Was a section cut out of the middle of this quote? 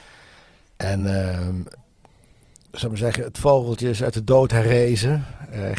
no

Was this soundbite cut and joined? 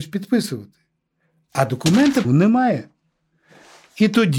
yes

